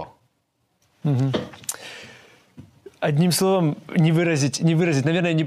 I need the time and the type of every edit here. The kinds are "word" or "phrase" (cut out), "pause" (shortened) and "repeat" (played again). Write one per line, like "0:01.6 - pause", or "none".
none